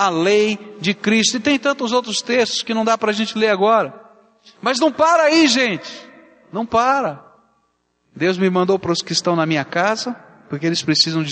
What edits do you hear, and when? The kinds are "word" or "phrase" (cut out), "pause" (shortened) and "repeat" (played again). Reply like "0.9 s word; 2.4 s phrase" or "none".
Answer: none

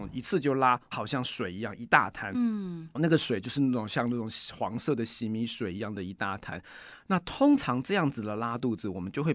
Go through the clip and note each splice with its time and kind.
0.9 s word; 2.9 s word

